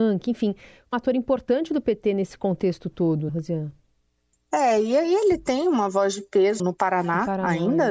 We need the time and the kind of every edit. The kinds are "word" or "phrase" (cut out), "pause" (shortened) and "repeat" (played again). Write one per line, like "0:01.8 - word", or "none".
0:00.9 - word
0:03.3 - word
0:06.6 - word